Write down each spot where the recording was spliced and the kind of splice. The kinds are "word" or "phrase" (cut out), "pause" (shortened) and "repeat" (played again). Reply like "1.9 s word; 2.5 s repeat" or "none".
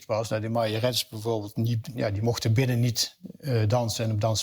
none